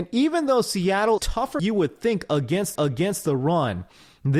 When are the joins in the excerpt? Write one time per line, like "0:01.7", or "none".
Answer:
0:01.2
0:01.6
0:02.8